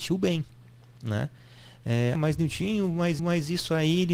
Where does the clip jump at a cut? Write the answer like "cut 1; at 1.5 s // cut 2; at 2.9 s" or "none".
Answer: cut 1; at 2.1 s // cut 2; at 3.2 s